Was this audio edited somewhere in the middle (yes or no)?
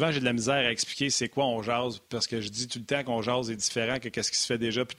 no